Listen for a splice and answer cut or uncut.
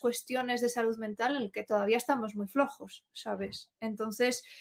uncut